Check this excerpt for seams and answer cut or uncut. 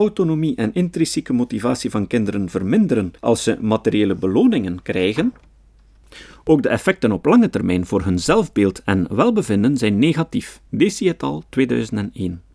cut